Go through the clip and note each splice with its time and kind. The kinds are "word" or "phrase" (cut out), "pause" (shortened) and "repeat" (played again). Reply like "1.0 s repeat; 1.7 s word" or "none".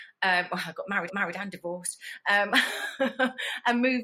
1.1 s repeat